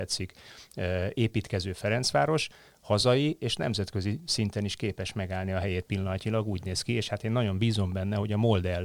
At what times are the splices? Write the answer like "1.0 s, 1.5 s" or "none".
none